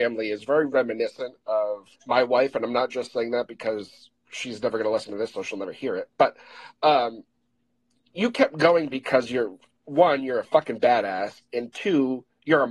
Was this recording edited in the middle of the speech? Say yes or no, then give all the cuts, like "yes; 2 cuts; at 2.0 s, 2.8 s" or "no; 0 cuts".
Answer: yes; 2 cuts; at 2.0 s, 4.2 s